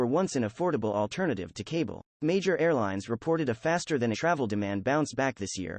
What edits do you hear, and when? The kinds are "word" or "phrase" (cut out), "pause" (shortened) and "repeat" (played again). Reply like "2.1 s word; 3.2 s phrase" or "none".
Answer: 2.1 s pause; 4.1 s word